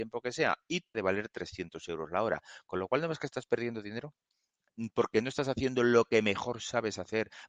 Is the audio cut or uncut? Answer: cut